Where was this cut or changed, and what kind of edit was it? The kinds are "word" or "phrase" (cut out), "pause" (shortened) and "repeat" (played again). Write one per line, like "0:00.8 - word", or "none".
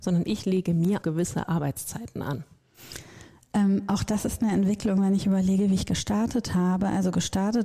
0:01.0 - word